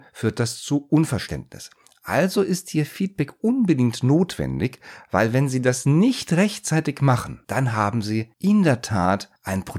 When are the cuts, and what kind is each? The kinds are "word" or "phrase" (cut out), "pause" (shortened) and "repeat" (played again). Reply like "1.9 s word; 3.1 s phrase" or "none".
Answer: none